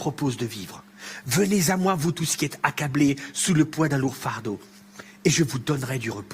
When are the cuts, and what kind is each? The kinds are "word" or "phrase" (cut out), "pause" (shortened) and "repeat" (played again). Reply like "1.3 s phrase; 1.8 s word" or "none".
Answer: none